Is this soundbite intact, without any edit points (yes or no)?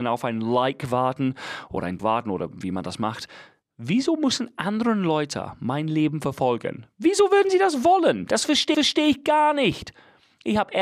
no